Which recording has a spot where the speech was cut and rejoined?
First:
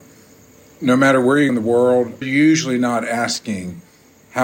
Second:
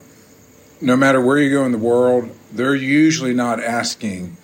first; 2 cuts; at 1.5 s, 2.2 s

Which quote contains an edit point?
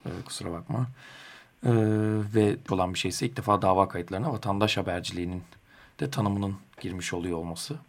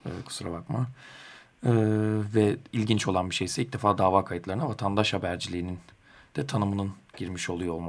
first; 1 cut; at 2.7 s

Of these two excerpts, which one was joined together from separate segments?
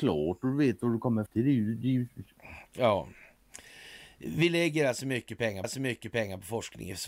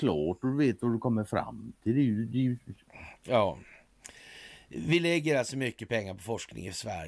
first; 2 cuts; at 1.3 s, 5.6 s

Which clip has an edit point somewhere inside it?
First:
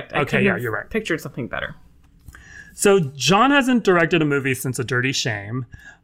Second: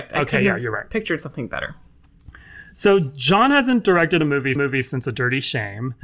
second; 1 cut; at 4.6 s

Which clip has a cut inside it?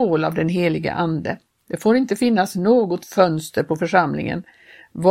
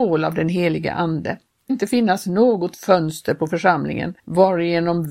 second; 2 cuts; at 1.7 s, 4.2 s

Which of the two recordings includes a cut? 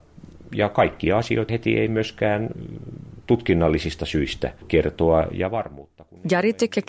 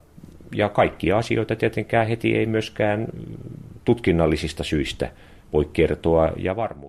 first; 2 cuts; at 1.5 s, 4.6 s

